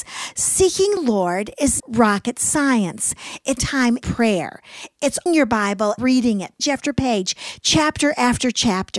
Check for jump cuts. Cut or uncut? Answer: cut